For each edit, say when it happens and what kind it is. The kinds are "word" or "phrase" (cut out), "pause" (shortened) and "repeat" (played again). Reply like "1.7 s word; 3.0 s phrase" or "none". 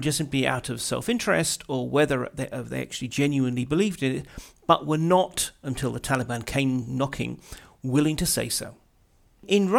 none